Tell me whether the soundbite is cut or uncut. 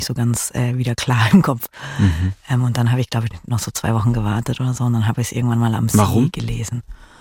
cut